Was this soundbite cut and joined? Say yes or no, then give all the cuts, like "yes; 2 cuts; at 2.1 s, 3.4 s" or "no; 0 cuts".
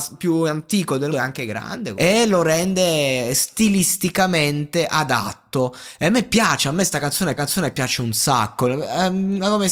yes; 3 cuts; at 1.1 s, 1.9 s, 7.4 s